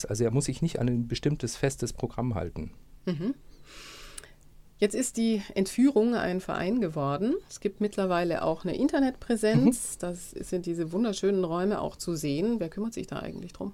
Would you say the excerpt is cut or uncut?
cut